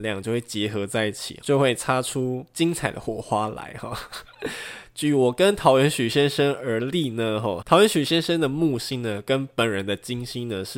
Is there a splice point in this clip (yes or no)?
yes